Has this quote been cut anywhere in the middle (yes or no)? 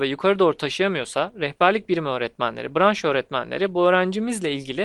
no